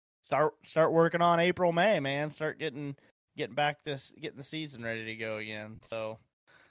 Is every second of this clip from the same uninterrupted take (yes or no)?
yes